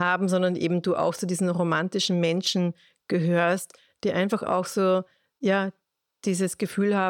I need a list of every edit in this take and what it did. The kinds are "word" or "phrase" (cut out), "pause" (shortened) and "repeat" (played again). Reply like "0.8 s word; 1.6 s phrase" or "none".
none